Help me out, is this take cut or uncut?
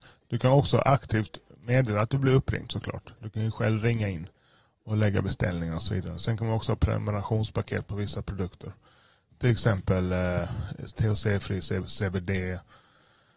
uncut